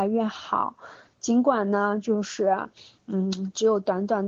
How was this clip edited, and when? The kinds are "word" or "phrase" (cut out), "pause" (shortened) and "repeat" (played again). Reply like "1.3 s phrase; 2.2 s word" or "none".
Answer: none